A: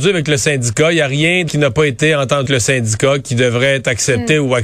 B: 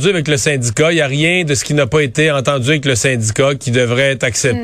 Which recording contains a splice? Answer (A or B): A